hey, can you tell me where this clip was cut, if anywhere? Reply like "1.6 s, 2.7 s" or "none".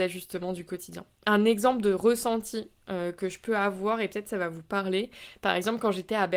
none